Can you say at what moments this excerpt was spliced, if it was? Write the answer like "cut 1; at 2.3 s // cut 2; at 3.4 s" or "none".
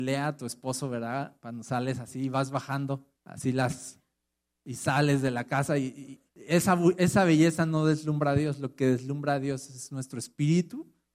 cut 1; at 3.2 s // cut 2; at 6.3 s